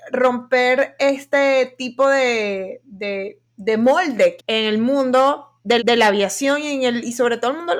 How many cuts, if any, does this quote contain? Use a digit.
3